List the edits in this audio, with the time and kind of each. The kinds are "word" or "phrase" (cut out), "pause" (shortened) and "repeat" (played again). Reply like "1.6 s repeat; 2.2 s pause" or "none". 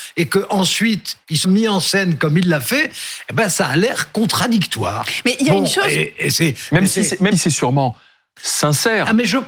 1.4 s word; 7.3 s word